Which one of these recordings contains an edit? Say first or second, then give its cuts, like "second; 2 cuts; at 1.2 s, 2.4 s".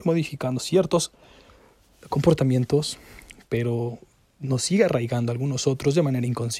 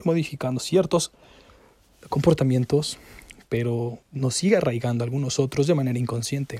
second; 1 cut; at 4.0 s